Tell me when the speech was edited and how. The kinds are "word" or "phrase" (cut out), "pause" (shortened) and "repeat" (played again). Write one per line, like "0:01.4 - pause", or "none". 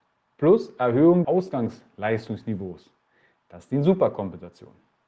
0:01.2 - word